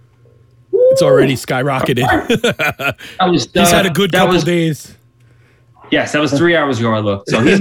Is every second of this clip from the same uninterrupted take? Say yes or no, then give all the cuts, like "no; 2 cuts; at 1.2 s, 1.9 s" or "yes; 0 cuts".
yes; 0 cuts